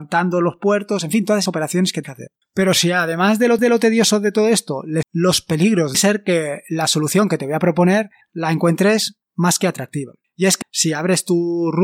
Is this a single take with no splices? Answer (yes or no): no